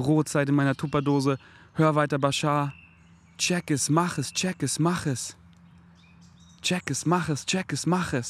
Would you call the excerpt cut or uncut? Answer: uncut